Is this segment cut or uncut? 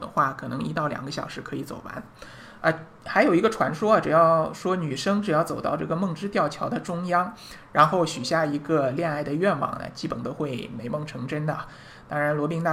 uncut